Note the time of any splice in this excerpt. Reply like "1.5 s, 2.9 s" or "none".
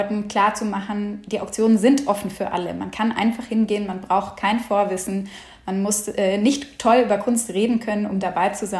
none